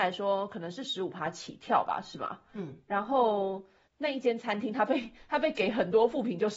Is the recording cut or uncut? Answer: uncut